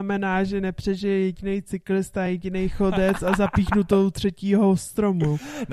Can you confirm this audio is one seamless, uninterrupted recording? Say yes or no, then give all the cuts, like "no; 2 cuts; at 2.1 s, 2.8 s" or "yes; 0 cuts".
yes; 0 cuts